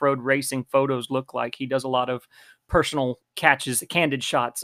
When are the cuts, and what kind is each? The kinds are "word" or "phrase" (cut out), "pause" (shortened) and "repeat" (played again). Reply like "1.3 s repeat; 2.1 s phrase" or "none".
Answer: 3.2 s word